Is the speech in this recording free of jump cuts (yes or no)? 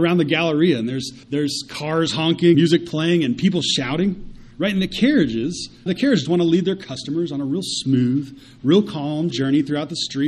no